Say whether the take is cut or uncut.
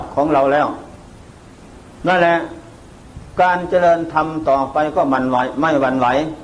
uncut